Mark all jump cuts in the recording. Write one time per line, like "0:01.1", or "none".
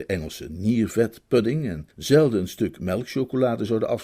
0:01.9